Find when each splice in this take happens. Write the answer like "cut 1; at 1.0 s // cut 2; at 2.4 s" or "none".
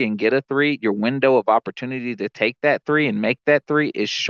none